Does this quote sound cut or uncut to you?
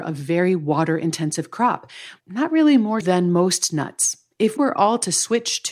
cut